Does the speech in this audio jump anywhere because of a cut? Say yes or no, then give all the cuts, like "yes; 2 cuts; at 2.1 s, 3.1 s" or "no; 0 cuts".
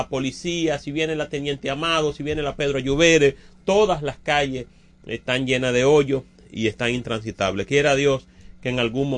no; 0 cuts